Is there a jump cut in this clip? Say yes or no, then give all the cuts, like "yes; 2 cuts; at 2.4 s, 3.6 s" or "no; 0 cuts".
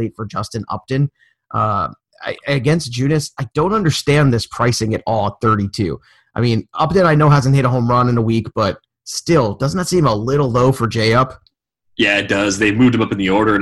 no; 0 cuts